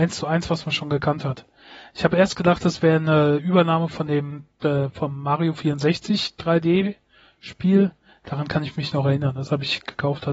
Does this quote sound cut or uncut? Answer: uncut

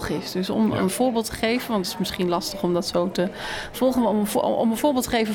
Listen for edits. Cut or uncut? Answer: uncut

